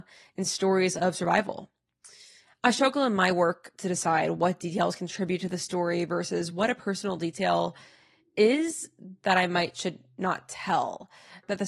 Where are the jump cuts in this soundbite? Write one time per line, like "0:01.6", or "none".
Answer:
none